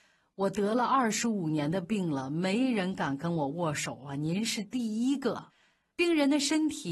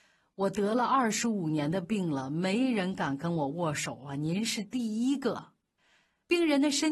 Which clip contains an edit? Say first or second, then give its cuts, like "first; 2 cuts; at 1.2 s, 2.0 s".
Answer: first; 1 cut; at 5.5 s